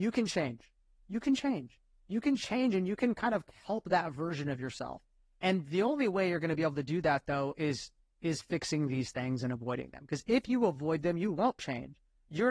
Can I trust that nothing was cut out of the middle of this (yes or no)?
yes